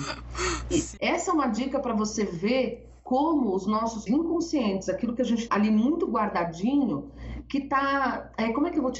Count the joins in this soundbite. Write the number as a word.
three